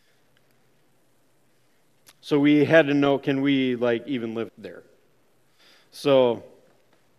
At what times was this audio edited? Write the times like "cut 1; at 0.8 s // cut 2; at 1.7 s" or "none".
cut 1; at 4.5 s